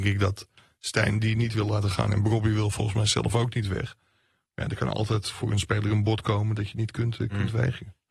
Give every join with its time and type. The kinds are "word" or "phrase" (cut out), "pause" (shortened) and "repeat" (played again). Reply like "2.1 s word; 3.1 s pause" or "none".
none